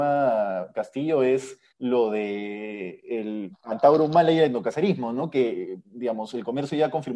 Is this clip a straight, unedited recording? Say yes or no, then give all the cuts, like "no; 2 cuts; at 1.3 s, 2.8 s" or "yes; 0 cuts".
no; 1 cut; at 1.7 s